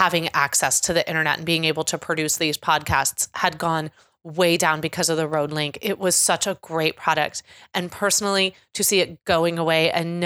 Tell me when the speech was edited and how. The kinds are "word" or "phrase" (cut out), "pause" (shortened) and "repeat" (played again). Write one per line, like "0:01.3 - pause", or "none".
none

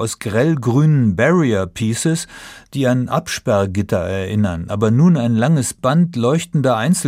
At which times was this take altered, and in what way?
none

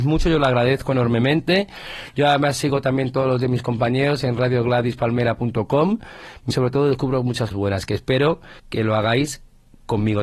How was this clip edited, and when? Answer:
0:06.5 - phrase
0:07.5 - word
0:08.6 - pause

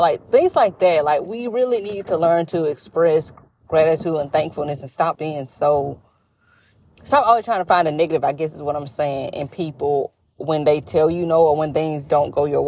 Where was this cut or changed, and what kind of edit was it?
0:05.1 - word

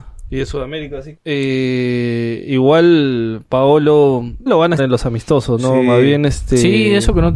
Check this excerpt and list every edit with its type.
0:01.2 - word
0:04.5 - word
0:04.8 - word

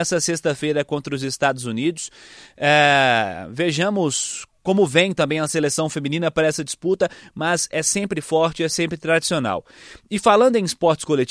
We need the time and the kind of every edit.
none

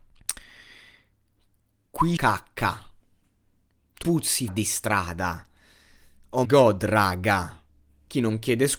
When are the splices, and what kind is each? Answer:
0:02.2 - word
0:04.0 - word
0:04.5 - word
0:06.4 - word

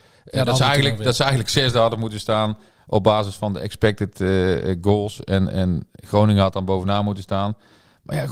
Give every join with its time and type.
none

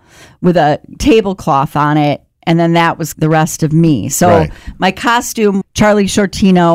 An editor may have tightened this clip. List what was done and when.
0:03.1 - word
0:05.6 - word

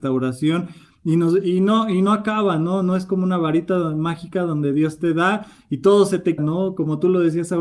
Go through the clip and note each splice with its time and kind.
0:06.4 - word

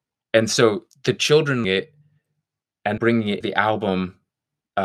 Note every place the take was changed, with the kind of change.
0:01.6 - word
0:03.0 - word
0:03.4 - word

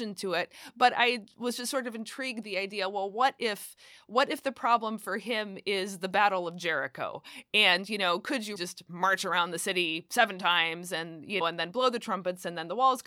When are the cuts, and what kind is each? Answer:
0:02.4 - word
0:08.6 - word
0:11.4 - word

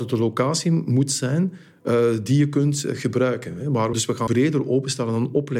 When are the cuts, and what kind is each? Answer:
0:03.9 - word
0:04.3 - word

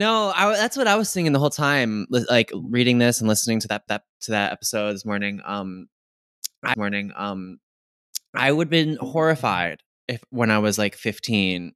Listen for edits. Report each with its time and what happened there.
0:03.9 - repeat
0:06.7 - repeat

